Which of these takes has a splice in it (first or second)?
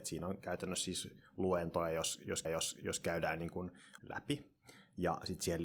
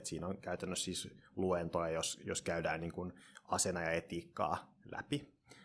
first